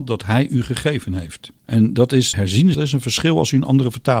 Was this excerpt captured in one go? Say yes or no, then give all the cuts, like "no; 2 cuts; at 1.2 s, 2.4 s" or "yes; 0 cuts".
no; 3 cuts; at 1.6 s, 2.3 s, 2.7 s